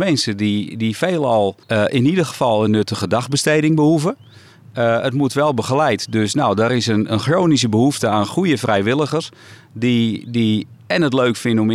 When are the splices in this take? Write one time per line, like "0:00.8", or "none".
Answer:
0:01.6